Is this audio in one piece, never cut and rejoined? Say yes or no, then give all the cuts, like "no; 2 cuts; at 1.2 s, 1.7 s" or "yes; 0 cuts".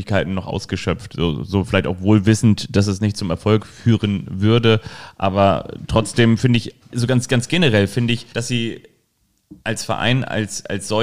no; 2 cuts; at 8.3 s, 9.6 s